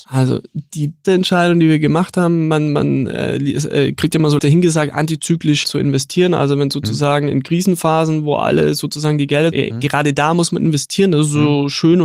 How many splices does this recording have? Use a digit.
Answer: 4